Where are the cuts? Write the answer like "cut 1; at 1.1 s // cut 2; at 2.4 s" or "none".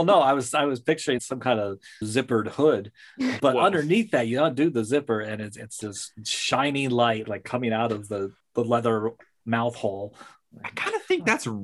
cut 1; at 1.2 s // cut 2; at 2.0 s // cut 3; at 3.4 s // cut 4; at 5.8 s // cut 5; at 7.2 s // cut 6; at 8.4 s